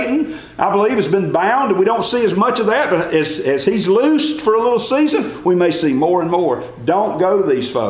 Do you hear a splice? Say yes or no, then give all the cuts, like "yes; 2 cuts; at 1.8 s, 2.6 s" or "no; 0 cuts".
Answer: no; 0 cuts